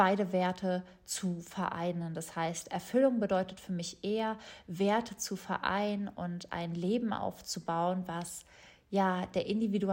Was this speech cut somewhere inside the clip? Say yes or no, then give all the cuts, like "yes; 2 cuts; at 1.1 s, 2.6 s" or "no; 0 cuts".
no; 0 cuts